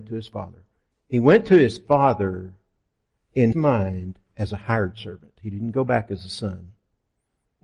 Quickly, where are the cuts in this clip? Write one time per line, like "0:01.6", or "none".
0:03.5